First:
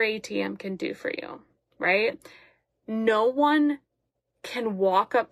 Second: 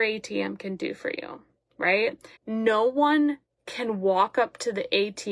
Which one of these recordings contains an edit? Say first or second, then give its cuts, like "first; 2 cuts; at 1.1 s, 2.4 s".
second; 2 cuts; at 2.4 s, 3.5 s